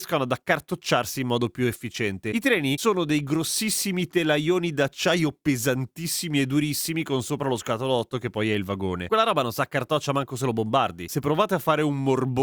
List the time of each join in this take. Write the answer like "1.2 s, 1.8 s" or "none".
none